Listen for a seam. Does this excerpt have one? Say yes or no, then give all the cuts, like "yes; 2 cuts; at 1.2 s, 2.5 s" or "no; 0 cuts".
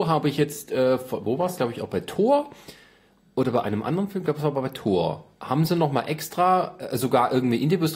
no; 0 cuts